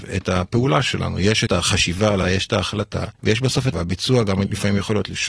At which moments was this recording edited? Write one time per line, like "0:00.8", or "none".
0:01.5
0:02.2
0:03.2
0:03.7